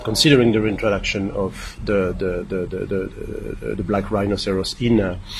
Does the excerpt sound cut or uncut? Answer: uncut